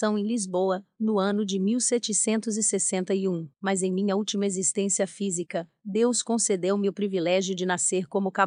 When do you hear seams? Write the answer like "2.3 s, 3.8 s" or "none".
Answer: 3.5 s